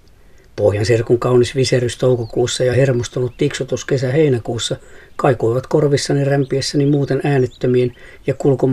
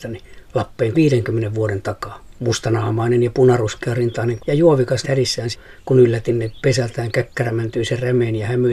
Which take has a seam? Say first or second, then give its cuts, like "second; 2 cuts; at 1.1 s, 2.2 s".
second; 5 cuts; at 0.9 s, 2.4 s, 4.4 s, 5.0 s, 5.5 s